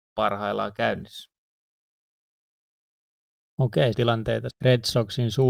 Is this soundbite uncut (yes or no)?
no